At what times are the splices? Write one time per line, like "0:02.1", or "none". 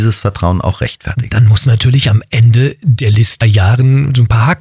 0:03.4